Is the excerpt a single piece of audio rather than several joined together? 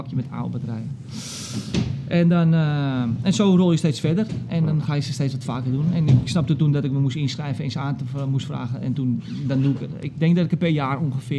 yes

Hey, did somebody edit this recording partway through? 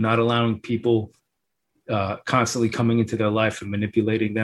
no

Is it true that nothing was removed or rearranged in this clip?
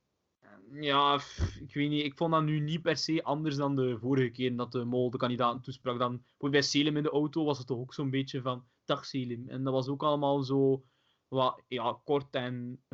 yes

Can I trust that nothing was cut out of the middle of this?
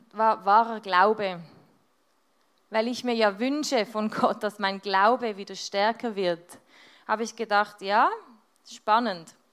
yes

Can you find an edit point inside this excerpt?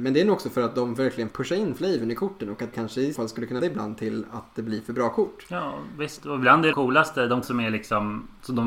yes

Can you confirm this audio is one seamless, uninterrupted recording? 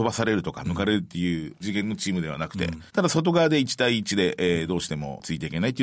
no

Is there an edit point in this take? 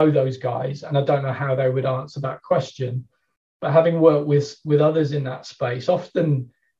no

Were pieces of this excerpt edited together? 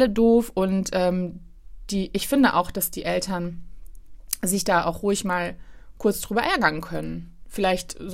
no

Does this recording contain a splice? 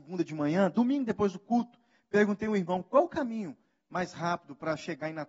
no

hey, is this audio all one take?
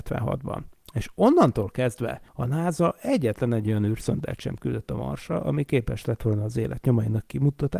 no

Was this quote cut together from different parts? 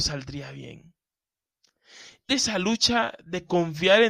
yes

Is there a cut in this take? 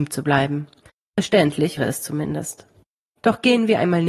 yes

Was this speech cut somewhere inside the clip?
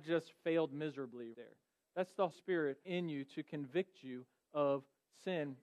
yes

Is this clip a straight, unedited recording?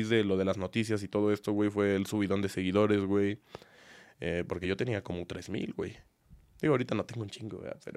yes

